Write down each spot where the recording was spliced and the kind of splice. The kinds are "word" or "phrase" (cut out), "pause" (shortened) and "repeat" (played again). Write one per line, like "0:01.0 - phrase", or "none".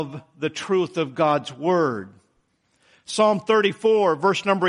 none